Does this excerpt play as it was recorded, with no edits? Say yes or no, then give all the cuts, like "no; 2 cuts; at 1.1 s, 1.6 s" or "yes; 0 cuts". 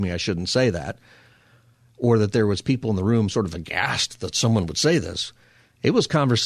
yes; 0 cuts